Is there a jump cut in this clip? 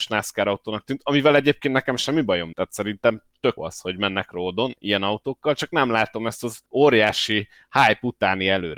yes; 3 cuts; at 2.5 s, 3.6 s, 6.7 s

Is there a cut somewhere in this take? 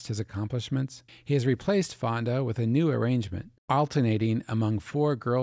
yes; 2 cuts; at 1.1 s, 3.6 s

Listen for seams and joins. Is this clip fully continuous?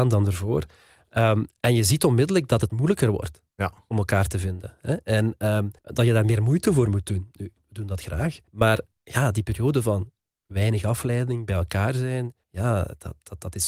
no; 5 cuts; at 3.5 s, 5.8 s, 8.5 s, 10.3 s, 12.4 s

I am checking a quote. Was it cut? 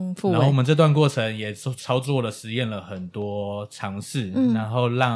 no; 0 cuts

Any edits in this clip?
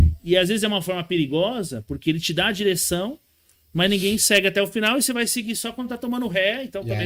no; 0 cuts

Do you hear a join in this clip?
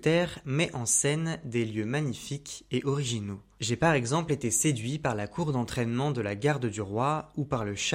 no; 0 cuts

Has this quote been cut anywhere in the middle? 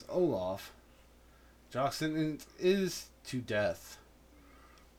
no; 0 cuts

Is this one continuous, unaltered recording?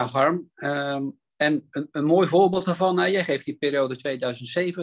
yes; 0 cuts

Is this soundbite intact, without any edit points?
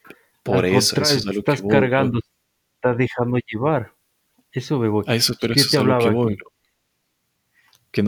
yes; 0 cuts

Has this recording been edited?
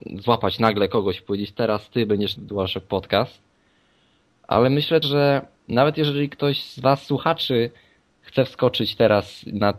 yes; 2 cuts; at 2.4 s, 5.0 s

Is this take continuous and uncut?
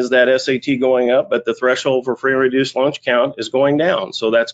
yes; 0 cuts

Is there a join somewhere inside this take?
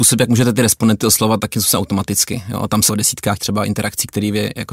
yes; 3 cuts; at 1.5 s, 2.9 s, 3.4 s

